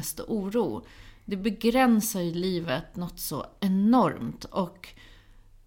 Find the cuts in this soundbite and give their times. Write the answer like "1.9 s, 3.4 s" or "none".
none

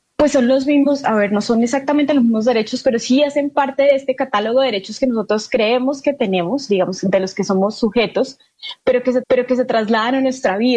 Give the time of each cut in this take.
9.2 s

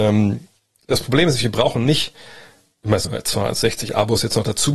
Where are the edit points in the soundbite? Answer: 3.0 s

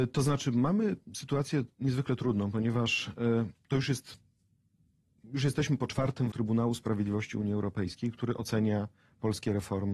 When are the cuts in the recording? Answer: 6.3 s

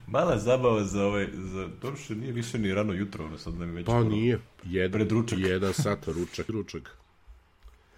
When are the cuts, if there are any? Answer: 6.5 s

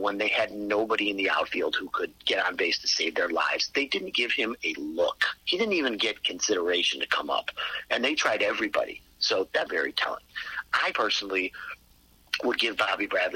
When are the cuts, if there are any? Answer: 4.1 s, 5.4 s, 9.7 s, 10.9 s

